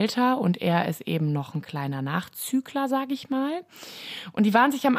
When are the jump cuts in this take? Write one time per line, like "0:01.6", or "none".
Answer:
none

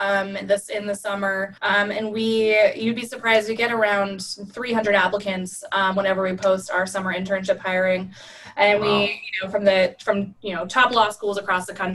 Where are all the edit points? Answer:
0:01.6

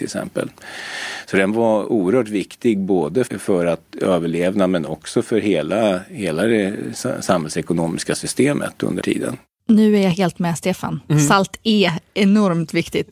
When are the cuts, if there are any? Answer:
0:03.3
0:03.9
0:09.0
0:12.1

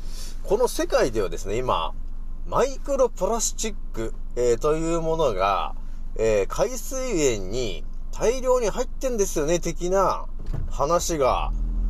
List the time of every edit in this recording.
none

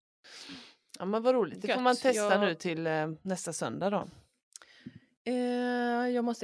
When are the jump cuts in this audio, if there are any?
none

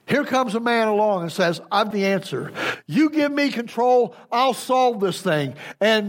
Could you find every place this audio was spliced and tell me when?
0:01.9

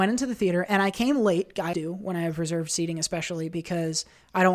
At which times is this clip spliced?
0:01.7

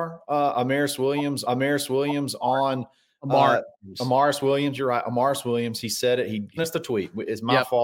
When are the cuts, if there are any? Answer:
0:01.5
0:03.7
0:06.6

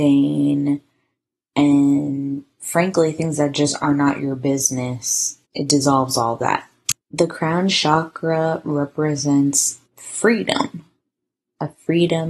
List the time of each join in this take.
0:05.5
0:07.0
0:09.9

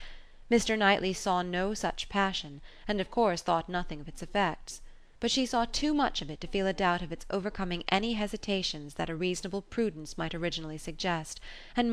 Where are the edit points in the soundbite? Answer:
0:05.2

